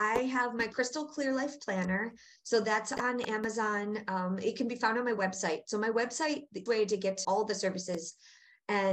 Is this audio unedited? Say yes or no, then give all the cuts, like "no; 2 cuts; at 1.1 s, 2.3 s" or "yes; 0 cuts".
no; 2 cuts; at 6.7 s, 7.2 s